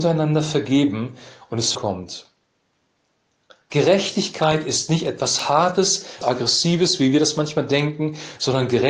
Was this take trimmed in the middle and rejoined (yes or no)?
yes